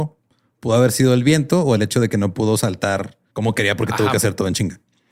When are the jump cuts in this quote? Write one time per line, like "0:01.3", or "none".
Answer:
0:03.3

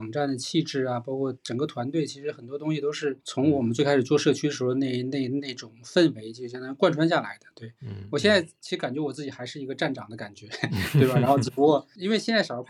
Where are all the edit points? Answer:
0:03.2

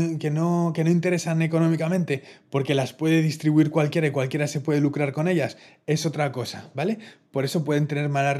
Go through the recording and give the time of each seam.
none

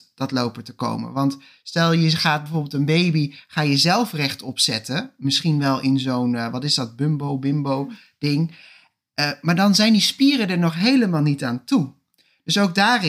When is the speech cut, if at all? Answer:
none

